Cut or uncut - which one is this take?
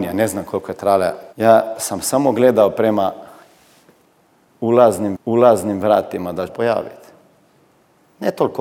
cut